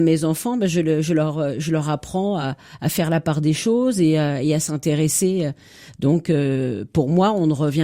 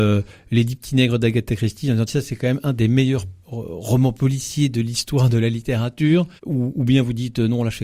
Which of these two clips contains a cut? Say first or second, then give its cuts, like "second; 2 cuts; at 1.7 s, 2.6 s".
second; 3 cuts; at 2.1 s, 3.4 s, 6.4 s